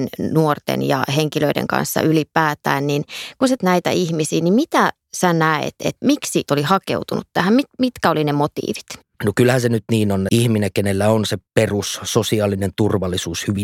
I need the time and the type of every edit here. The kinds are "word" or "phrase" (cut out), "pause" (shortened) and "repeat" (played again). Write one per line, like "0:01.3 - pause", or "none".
0:03.6 - word
0:06.5 - word
0:09.1 - pause
0:10.3 - word
0:11.5 - pause

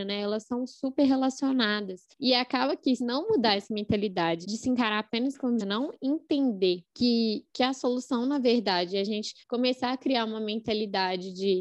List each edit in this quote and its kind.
0:02.1 - pause
0:03.0 - phrase
0:04.4 - word
0:05.6 - word
0:06.9 - pause
0:09.4 - pause

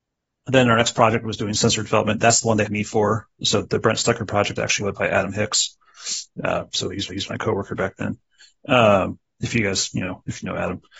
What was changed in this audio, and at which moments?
0:02.7 - word
0:03.6 - word
0:04.6 - word
0:06.3 - pause
0:07.1 - repeat

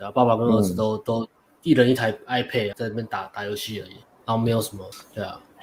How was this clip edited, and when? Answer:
0:02.7 - word

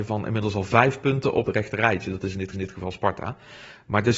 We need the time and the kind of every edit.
0:01.5 - phrase
0:02.5 - repeat

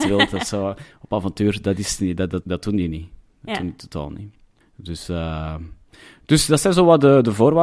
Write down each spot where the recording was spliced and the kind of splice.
0:02.4 - word
0:04.6 - pause

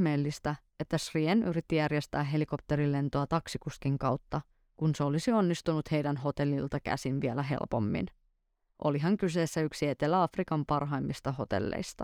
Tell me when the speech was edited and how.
none

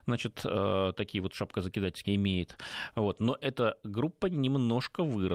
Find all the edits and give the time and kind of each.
0:02.0 - word

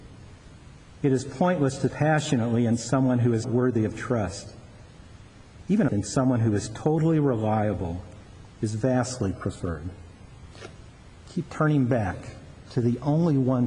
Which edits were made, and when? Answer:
0:01.9 - word
0:03.4 - word
0:05.9 - phrase

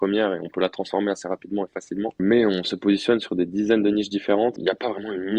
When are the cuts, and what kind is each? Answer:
none

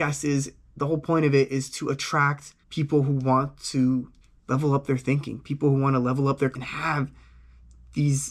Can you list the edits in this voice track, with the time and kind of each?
0:02.6 - pause
0:04.2 - pause
0:06.5 - word

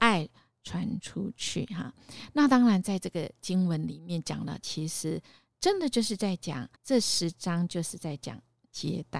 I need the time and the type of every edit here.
0:06.8 - pause

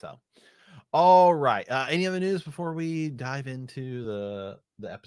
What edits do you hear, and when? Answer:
none

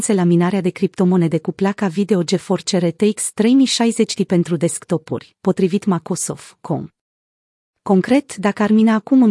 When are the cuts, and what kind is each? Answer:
none

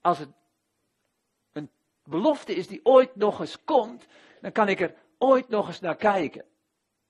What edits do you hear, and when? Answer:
none

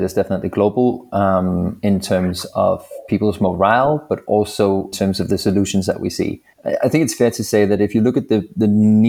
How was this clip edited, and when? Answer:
0:04.9 - word
0:06.5 - pause

